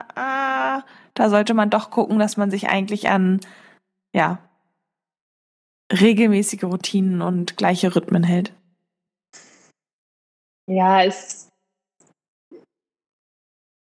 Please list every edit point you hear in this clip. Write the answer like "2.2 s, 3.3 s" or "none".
none